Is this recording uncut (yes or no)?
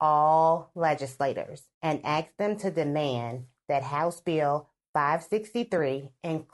no